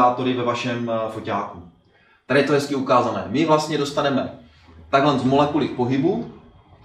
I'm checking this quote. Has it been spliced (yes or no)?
no